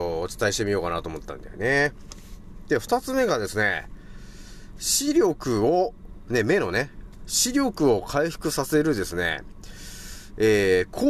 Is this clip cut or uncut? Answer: uncut